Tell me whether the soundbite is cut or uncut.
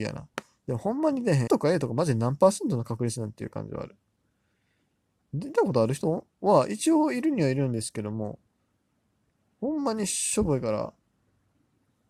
cut